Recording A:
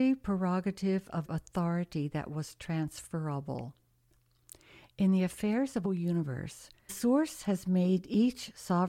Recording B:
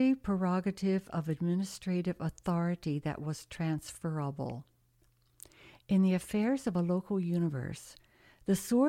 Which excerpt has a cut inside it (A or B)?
A